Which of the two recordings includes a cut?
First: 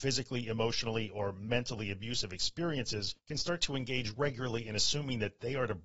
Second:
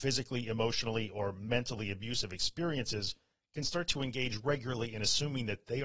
first; 1 cut; at 3.2 s

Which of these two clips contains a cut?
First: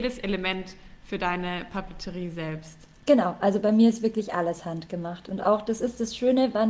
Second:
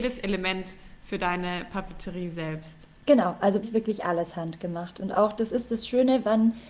second; 1 cut; at 3.6 s

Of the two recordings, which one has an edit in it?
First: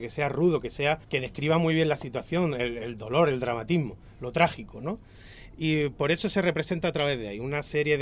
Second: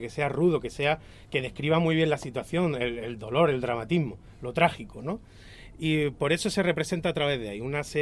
first; 1 cut; at 1.0 s

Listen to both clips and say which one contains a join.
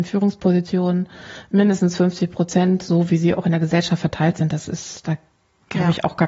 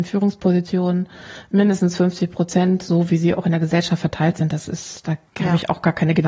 second; 1 cut; at 5.3 s

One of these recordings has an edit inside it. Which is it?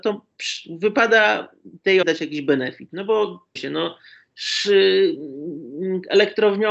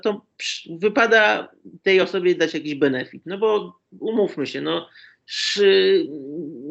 first; 2 cuts; at 2.0 s, 3.6 s

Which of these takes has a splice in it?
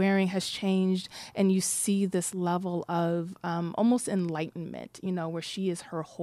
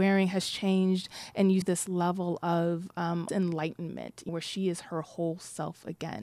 second; 3 cuts; at 1.6 s, 3.3 s, 4.3 s

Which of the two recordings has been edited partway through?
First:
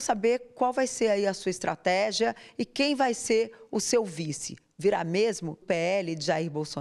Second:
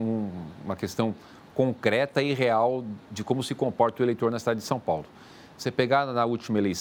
first; 1 cut; at 5.6 s

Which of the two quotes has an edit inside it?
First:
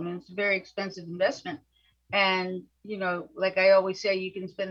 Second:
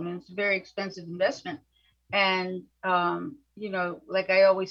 first; 1 cut; at 2.7 s

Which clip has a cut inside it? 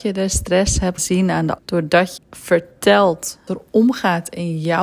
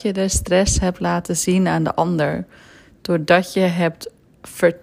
first; 4 cuts; at 1.0 s, 1.6 s, 2.2 s, 3.5 s

